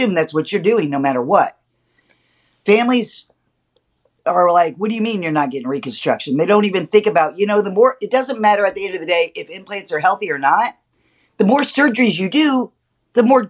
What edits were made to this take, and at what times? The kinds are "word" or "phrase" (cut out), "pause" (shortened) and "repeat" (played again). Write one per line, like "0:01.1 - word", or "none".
none